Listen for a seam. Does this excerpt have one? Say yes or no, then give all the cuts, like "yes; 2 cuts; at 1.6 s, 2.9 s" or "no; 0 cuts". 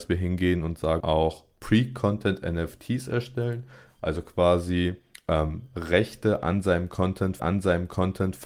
yes; 3 cuts; at 1.0 s, 5.1 s, 7.4 s